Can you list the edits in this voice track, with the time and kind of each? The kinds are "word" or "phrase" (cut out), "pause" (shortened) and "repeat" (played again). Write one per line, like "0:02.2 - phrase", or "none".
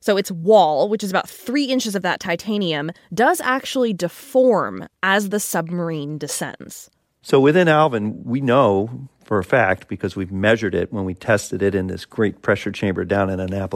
none